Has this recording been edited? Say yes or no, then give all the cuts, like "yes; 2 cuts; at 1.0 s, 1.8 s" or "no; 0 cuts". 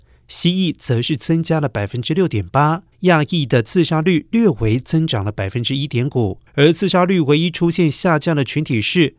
yes; 2 cuts; at 2.9 s, 6.5 s